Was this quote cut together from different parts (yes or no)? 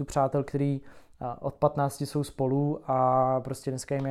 no